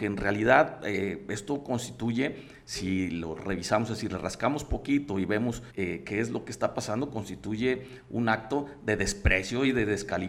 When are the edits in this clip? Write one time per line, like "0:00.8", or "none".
0:05.7